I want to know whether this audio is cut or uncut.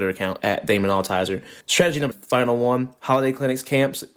cut